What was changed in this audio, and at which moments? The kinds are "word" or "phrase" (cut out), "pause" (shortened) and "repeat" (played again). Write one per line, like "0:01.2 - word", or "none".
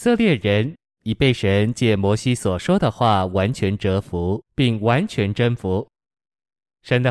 0:04.5 - pause